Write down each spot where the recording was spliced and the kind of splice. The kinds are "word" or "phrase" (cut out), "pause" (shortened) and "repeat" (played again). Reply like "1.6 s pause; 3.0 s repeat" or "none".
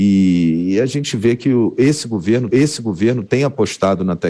2.5 s repeat